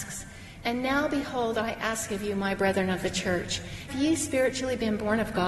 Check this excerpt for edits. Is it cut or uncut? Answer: cut